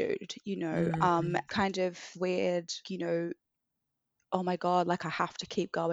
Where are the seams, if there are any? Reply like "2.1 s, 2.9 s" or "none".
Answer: 1.5 s, 2.1 s, 2.8 s